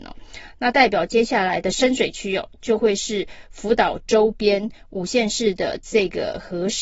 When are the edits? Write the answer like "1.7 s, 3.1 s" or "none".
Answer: none